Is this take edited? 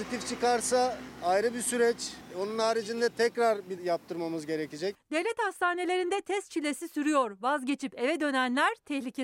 yes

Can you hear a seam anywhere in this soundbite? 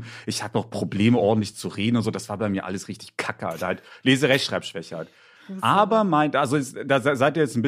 no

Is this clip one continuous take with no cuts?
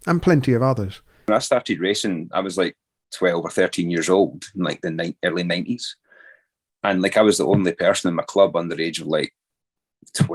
yes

